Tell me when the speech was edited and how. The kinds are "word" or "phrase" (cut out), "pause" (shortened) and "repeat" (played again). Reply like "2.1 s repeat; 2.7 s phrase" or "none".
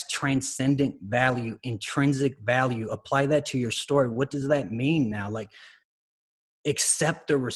none